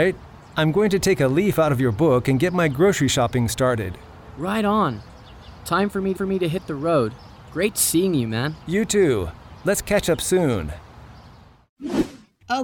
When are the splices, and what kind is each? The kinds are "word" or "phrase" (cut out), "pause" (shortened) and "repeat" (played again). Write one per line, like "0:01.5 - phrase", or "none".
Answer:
0:06.1 - repeat
0:08.6 - pause